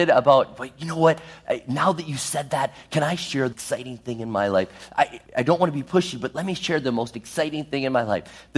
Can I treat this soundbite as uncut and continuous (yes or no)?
no